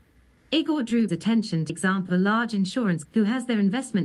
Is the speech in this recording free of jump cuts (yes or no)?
no